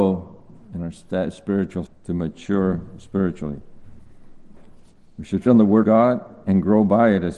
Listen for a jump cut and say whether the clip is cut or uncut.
cut